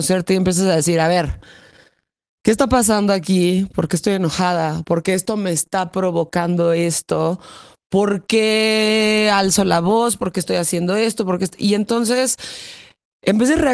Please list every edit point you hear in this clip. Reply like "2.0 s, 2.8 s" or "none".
none

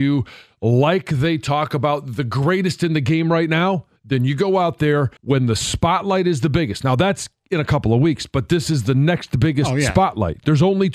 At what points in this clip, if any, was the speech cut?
4.0 s, 5.2 s

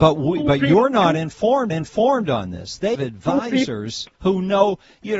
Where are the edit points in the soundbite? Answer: 1.7 s, 3.0 s, 4.1 s

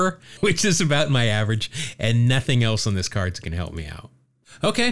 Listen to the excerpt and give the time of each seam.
none

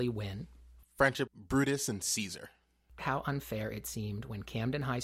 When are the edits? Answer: 1.3 s, 3.0 s

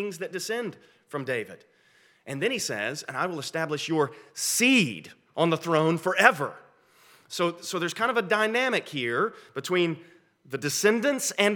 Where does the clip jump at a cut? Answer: none

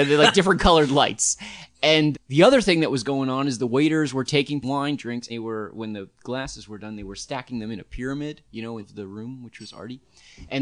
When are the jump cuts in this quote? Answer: 2.1 s, 4.6 s, 5.3 s, 8.5 s, 8.8 s

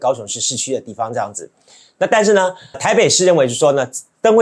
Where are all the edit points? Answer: 2.7 s

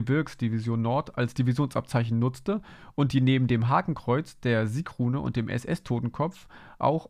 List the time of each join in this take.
none

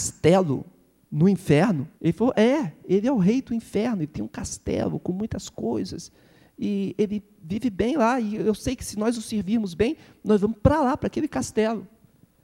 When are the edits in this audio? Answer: 1.9 s

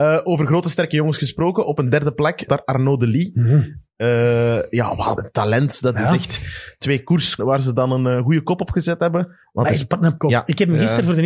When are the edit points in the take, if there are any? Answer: 2.5 s, 5.2 s, 7.4 s, 10.2 s

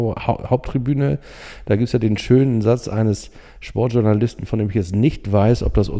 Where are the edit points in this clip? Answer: none

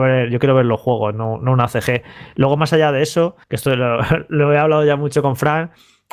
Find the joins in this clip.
3.4 s

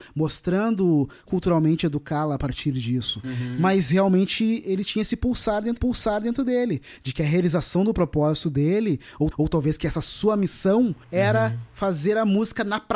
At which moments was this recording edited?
1.3 s, 5.8 s, 9.3 s

